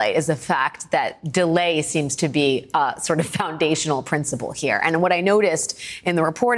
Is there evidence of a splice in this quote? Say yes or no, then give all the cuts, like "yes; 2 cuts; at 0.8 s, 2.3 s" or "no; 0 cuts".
no; 0 cuts